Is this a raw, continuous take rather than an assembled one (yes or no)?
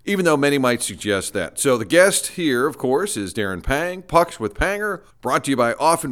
no